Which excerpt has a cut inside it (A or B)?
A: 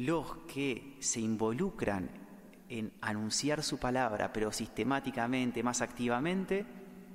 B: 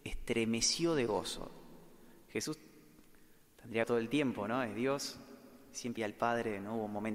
B